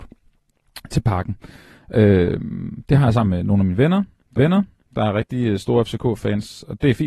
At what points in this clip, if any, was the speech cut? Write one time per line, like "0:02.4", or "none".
0:04.4